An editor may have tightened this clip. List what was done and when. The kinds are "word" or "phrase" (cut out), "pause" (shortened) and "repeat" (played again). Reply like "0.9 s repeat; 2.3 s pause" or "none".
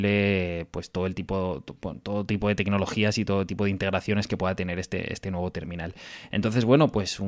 none

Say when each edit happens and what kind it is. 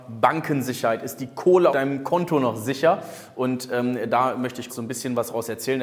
1.7 s word; 4.7 s word

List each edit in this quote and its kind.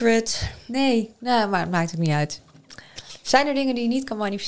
none

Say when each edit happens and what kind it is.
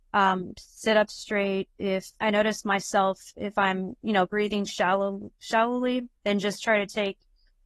2.1 s word; 4.0 s pause; 6.1 s word

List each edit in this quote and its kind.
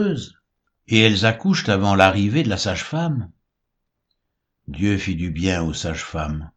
none

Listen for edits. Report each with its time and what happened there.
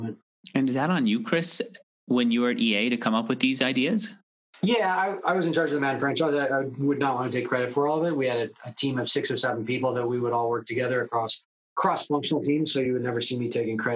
none

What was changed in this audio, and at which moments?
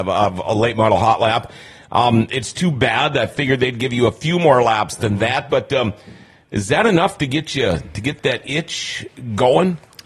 none

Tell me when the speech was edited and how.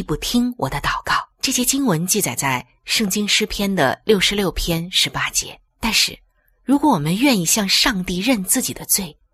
1.3 s pause; 5.7 s pause

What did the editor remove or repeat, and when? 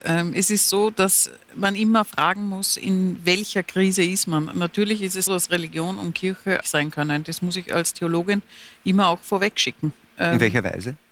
5.3 s word; 6.6 s phrase

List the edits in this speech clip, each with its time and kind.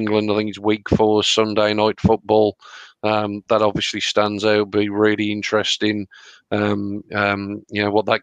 7.1 s phrase

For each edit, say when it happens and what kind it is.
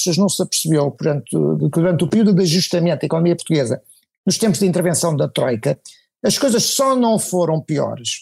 none

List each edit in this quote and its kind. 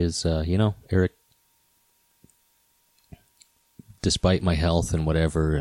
none

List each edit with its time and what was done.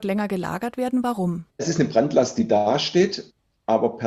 1.5 s pause

